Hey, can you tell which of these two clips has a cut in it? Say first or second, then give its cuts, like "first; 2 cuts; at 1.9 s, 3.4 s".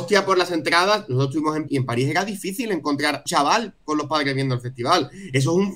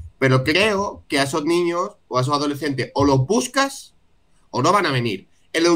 first; 2 cuts; at 1.7 s, 3.3 s